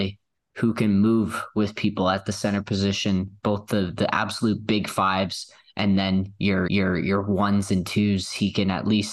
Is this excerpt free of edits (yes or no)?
no